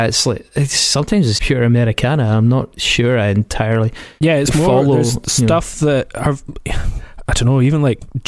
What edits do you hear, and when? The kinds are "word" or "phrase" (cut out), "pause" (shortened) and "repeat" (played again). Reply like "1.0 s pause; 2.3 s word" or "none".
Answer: 1.4 s word; 7.3 s word